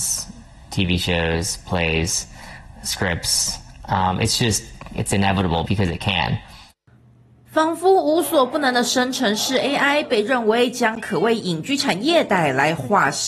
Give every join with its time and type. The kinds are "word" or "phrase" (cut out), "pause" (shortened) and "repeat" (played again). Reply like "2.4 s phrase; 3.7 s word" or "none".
5.7 s word